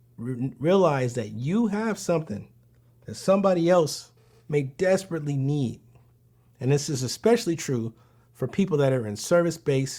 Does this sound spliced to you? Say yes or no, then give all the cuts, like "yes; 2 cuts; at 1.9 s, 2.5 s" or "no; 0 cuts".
no; 0 cuts